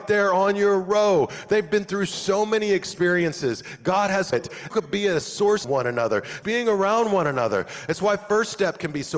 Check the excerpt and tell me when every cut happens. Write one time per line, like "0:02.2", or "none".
0:04.3
0:04.7
0:05.6
0:06.4